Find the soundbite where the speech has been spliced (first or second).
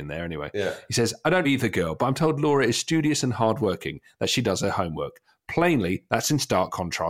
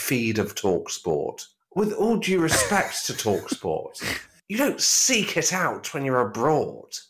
first